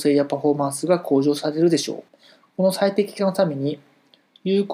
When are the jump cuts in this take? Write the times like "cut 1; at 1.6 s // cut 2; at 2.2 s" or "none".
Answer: cut 1; at 2.1 s